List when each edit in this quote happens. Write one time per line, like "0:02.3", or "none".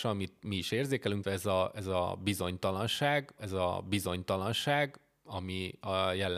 0:01.2
0:03.4